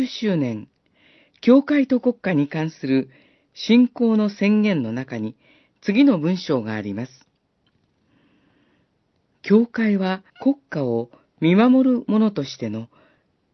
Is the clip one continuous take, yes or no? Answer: no